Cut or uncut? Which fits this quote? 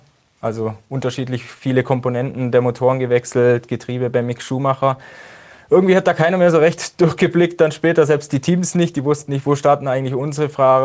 uncut